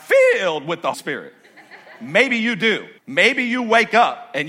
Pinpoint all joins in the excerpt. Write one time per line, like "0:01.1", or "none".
0:00.9
0:03.0

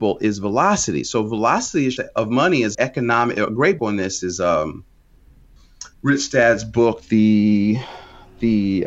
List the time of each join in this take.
0:02.0
0:02.7
0:03.8
0:05.9

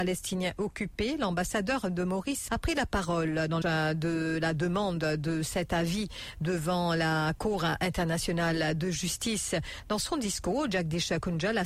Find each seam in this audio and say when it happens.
0:02.5
0:03.6

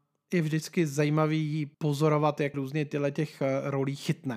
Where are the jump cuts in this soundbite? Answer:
0:01.7
0:02.5

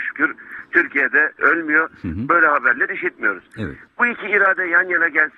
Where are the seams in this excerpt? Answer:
0:01.4

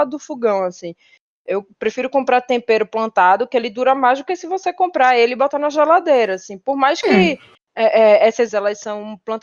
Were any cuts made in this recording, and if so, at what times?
0:08.5

